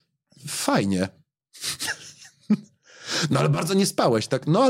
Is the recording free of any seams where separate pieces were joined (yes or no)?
yes